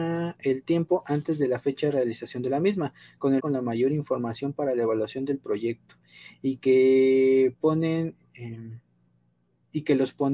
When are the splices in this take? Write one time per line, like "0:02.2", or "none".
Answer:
0:03.4